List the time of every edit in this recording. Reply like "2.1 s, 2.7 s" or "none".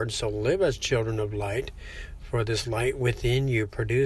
none